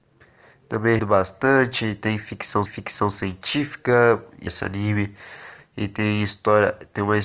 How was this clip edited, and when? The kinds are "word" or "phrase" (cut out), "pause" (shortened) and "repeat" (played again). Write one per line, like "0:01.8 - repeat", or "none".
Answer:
0:01.0 - word
0:02.7 - repeat
0:04.5 - phrase